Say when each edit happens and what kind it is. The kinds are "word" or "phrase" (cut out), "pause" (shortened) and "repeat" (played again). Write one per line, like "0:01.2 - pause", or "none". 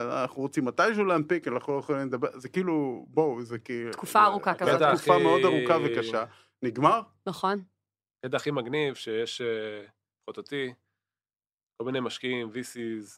none

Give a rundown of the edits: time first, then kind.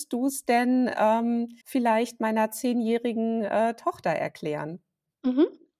0:01.6 - pause

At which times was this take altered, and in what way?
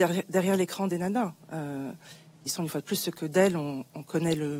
none

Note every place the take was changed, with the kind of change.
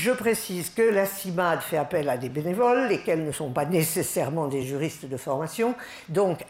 none

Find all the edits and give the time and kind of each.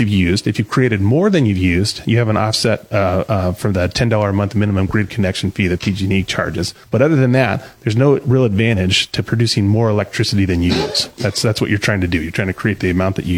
none

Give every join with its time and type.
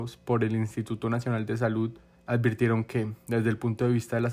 0:02.1 - pause

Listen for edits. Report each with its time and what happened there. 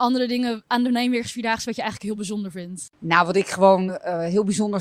none

